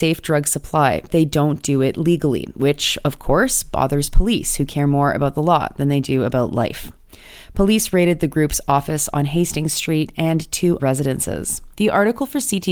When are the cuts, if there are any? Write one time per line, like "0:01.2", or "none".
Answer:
0:01.1
0:10.8
0:11.7